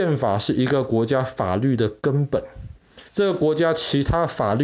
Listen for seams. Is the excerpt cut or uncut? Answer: cut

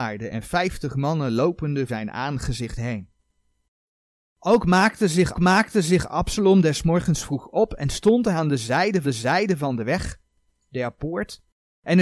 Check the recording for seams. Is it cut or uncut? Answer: cut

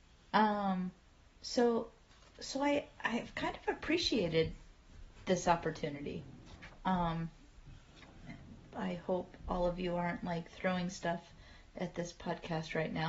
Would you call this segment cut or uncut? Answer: uncut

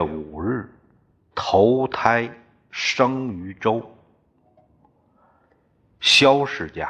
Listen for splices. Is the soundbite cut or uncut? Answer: uncut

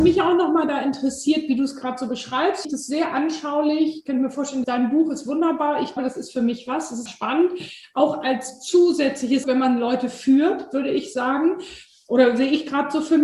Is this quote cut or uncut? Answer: cut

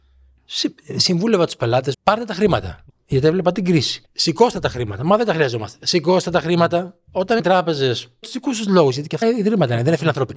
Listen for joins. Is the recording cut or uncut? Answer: cut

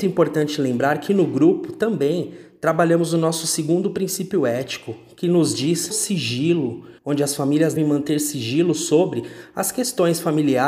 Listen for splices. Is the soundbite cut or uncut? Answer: cut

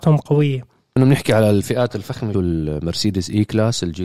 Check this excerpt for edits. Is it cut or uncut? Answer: cut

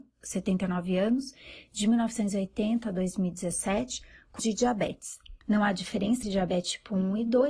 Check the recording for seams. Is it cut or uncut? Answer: cut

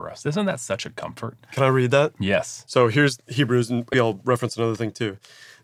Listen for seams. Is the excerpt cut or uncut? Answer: cut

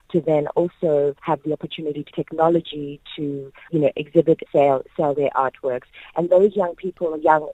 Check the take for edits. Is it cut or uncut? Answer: cut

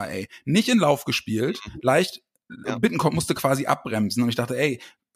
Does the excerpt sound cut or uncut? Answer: cut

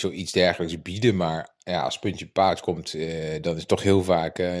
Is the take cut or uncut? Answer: uncut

